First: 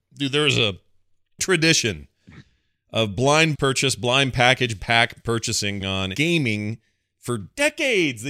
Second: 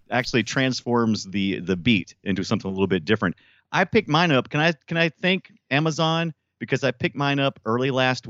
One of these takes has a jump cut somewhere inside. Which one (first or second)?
first